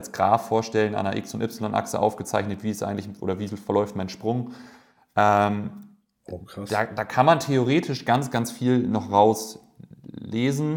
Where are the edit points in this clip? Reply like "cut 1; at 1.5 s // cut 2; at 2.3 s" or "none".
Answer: none